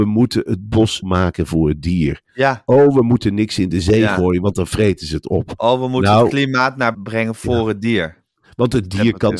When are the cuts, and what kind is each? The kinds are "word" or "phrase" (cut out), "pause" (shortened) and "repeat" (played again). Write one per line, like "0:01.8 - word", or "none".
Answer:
0:01.0 - word
0:06.9 - word